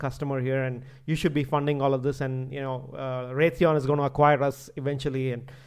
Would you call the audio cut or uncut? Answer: uncut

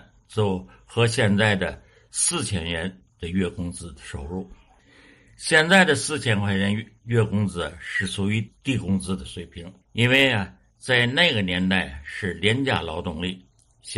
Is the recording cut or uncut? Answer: cut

